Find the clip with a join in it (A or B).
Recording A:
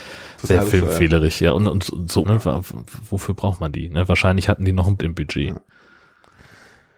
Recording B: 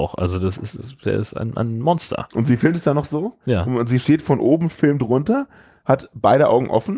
A